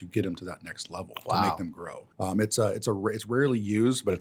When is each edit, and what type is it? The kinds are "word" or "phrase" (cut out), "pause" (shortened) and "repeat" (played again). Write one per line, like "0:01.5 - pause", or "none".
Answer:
0:02.1 - pause